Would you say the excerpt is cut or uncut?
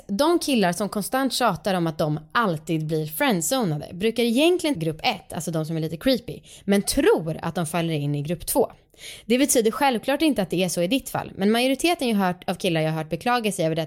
cut